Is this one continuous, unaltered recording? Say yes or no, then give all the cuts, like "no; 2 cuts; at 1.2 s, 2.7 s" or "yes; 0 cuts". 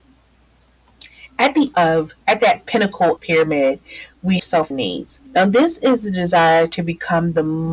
no; 6 cuts; at 1.7 s, 2.2 s, 3.2 s, 4.4 s, 4.7 s, 5.3 s